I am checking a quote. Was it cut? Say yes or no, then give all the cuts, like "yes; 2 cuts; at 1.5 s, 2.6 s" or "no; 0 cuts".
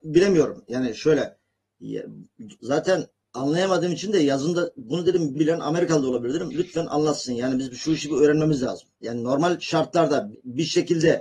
yes; 3 cuts; at 5.3 s, 8.9 s, 10.3 s